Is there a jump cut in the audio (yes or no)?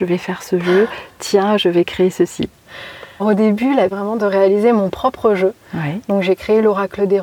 yes